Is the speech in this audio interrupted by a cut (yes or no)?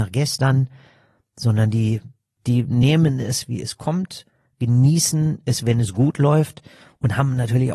no